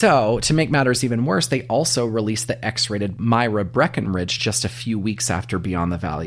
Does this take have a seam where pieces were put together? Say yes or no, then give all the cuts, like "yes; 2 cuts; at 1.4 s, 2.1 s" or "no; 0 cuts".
no; 0 cuts